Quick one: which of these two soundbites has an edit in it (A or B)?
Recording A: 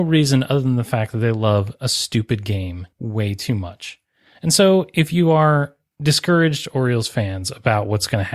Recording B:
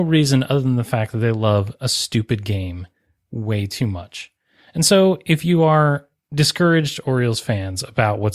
A